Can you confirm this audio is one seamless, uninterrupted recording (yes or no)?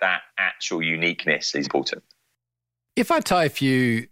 no